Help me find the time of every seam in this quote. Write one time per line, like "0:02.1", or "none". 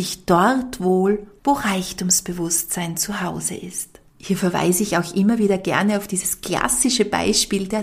0:01.4
0:04.1